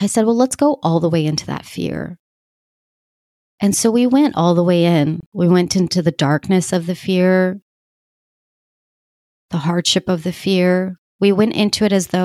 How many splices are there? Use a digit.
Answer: 0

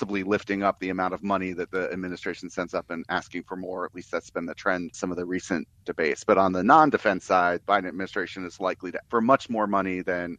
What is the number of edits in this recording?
4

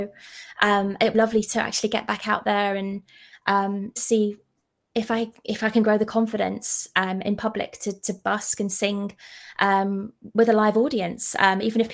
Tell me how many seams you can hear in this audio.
3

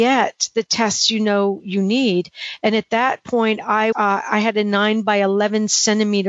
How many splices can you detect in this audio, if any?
1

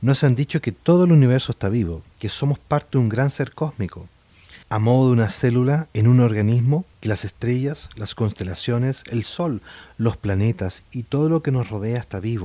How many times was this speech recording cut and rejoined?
4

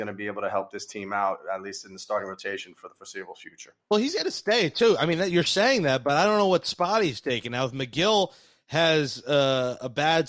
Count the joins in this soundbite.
0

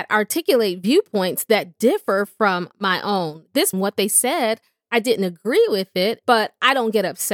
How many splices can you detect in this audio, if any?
1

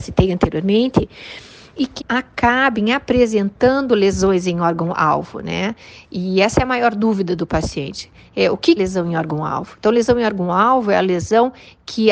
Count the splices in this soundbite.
2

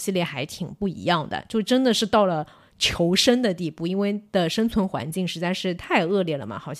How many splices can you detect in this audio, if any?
0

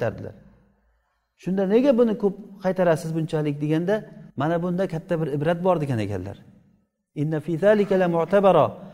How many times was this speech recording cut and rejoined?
1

